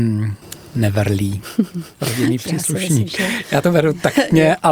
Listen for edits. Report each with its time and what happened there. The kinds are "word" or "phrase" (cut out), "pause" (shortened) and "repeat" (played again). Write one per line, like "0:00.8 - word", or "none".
none